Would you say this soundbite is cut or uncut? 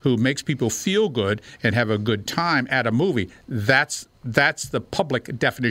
cut